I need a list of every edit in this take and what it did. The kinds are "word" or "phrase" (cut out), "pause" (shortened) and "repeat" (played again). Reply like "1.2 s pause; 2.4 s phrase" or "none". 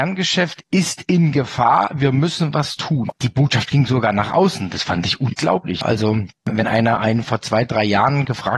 none